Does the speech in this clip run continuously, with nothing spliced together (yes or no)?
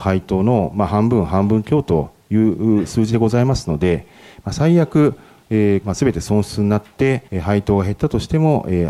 no